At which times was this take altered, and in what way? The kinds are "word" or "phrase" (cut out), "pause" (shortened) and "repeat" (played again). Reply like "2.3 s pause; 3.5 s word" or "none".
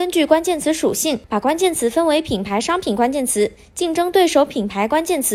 none